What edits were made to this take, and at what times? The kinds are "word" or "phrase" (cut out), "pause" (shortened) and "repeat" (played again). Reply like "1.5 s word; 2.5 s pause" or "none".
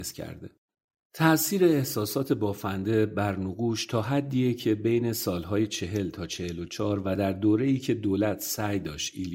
none